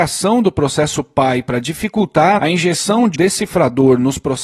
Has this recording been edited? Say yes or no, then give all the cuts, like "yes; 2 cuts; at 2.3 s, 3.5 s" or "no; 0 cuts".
yes; 2 cuts; at 2.4 s, 3.1 s